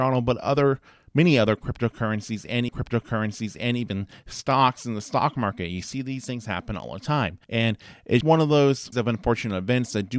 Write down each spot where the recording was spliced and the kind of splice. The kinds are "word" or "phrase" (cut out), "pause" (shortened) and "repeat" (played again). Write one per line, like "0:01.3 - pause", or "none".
0:02.7 - repeat
0:07.4 - pause
0:08.2 - word
0:08.9 - phrase